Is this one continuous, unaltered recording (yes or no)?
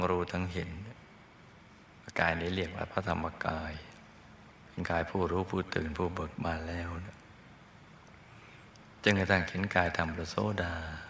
no